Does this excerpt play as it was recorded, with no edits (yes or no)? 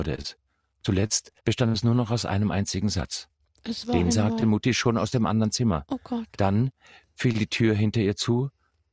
no